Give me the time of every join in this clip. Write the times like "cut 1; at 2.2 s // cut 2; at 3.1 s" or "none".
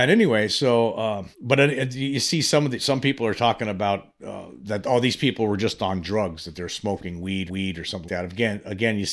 cut 1; at 1.3 s // cut 2; at 7.5 s // cut 3; at 8.1 s